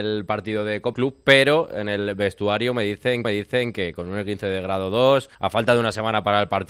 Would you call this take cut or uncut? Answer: cut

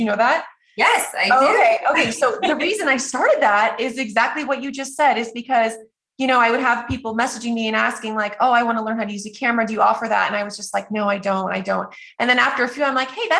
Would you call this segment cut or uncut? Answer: uncut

